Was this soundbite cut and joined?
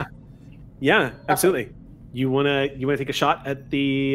no; 0 cuts

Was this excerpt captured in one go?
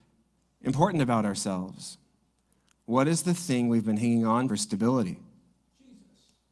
no; 1 cut; at 4.5 s

